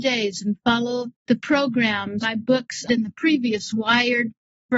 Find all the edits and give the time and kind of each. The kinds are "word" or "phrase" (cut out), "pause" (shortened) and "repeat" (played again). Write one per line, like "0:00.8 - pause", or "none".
0:01.2 - pause
0:02.2 - word
0:02.9 - word
0:03.7 - word